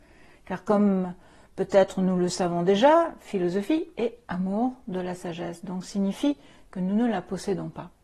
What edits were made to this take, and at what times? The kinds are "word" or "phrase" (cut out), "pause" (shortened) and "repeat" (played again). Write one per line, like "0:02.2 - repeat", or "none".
none